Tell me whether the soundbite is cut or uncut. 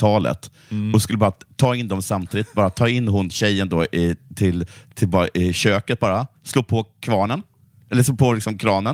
uncut